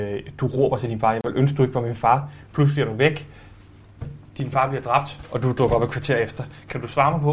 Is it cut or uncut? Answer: uncut